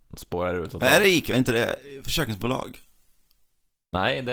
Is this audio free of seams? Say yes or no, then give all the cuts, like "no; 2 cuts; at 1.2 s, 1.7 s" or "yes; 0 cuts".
yes; 0 cuts